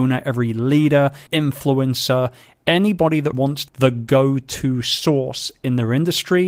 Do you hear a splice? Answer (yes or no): yes